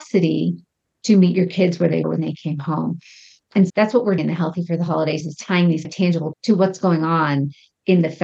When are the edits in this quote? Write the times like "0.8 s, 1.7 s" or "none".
2.0 s, 3.7 s, 4.2 s, 5.2 s, 5.8 s, 6.3 s